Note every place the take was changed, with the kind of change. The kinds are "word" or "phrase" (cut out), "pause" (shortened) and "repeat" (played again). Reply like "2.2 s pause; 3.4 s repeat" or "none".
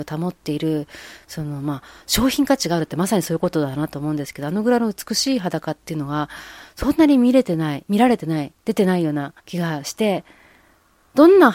9.4 s pause